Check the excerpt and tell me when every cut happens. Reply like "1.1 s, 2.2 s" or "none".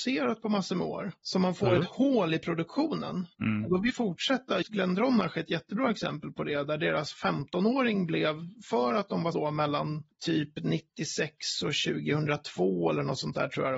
3.9 s, 4.6 s, 9.3 s